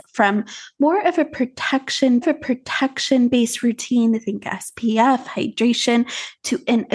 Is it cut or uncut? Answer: cut